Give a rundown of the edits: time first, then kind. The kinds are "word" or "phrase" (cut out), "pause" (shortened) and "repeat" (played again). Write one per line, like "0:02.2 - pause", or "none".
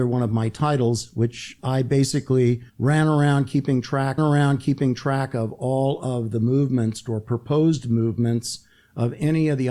0:01.6 - word
0:02.7 - pause
0:04.2 - repeat

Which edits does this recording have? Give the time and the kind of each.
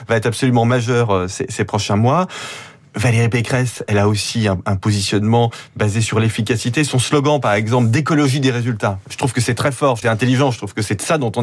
0:10.0 - phrase

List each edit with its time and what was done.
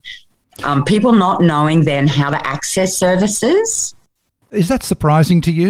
none

